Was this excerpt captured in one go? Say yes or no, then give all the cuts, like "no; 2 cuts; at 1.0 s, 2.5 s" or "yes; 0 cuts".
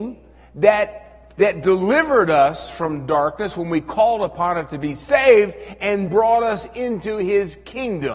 no; 1 cut; at 6.1 s